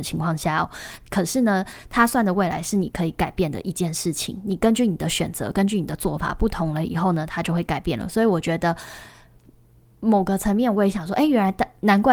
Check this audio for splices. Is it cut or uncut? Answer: uncut